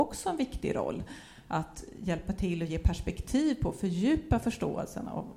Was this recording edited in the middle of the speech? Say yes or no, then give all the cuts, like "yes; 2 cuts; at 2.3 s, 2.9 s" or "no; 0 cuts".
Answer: no; 0 cuts